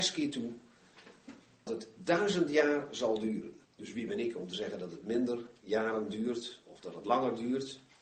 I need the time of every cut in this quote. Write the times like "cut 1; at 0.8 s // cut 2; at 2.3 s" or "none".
cut 1; at 1.7 s // cut 2; at 3.6 s